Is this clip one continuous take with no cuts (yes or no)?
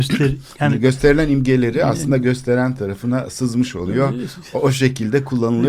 yes